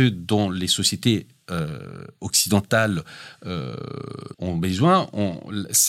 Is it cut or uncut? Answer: cut